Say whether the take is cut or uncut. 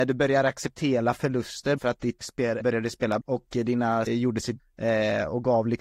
cut